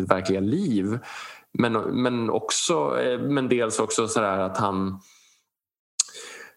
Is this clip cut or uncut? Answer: uncut